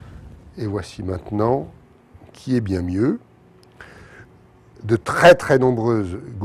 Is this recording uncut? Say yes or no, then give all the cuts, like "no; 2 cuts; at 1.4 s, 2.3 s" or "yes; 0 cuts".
yes; 0 cuts